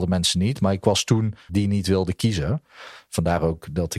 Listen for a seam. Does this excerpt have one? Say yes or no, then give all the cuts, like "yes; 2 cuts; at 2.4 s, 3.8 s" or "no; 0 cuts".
yes; 1 cut; at 1.5 s